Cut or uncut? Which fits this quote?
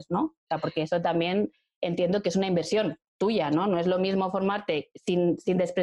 uncut